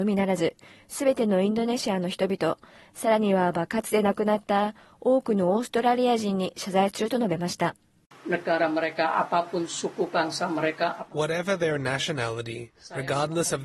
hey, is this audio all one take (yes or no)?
yes